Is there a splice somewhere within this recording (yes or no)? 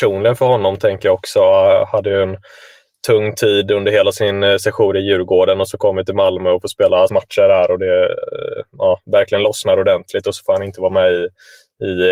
yes